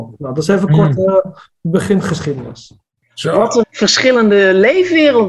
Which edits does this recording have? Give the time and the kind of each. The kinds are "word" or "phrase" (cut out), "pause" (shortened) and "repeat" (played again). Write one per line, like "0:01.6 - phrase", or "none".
0:03.6 - word

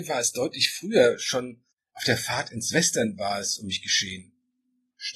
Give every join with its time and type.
none

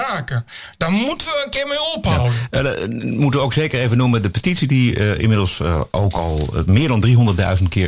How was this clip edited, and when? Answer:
none

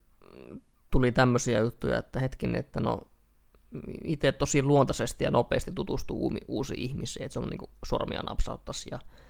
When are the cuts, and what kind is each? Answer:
none

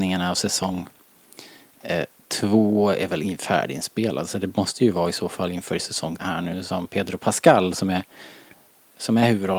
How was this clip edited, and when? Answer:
0:06.2 - word

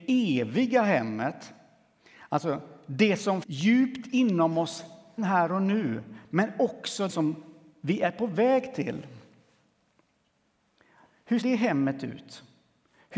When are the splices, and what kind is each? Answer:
0:03.4 - word
0:05.2 - word
0:07.1 - word
0:11.4 - word

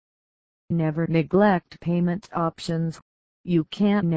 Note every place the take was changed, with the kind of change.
none

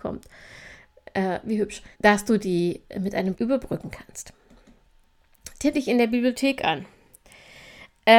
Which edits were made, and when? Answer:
0:01.9 - pause
0:03.3 - word
0:05.7 - phrase

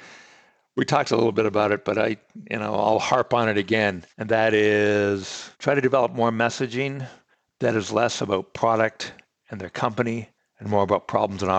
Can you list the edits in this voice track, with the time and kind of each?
0:04.1 - pause
0:05.5 - pause

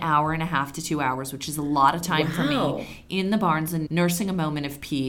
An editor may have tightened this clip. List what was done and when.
0:03.9 - word

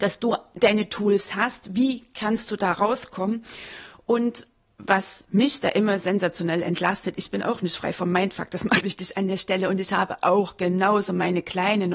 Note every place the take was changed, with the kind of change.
0:08.8 - word

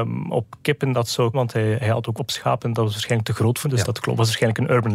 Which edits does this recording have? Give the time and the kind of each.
0:01.3 - word
0:02.2 - word
0:03.6 - word

